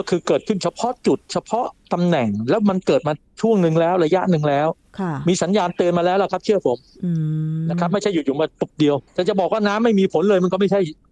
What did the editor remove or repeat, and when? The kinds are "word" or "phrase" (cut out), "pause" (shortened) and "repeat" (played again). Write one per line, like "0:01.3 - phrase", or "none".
0:09.1 - pause